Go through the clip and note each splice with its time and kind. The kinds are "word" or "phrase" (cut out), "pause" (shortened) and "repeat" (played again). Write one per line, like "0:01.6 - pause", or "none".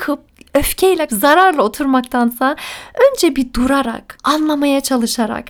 0:01.1 - word